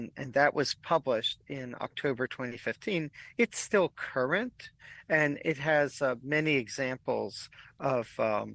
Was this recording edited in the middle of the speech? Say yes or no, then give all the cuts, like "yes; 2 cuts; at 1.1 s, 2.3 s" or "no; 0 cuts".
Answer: no; 0 cuts